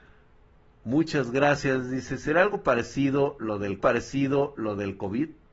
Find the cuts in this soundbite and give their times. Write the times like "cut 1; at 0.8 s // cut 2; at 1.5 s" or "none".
cut 1; at 3.8 s